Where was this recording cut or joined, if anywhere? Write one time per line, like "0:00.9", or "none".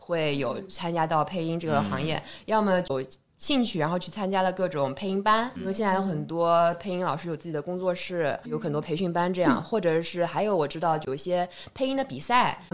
0:05.6
0:08.4